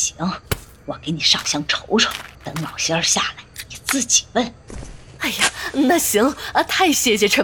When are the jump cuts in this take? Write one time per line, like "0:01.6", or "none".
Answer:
0:02.3